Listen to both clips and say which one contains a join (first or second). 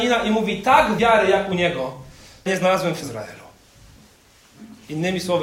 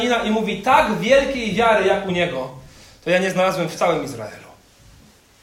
first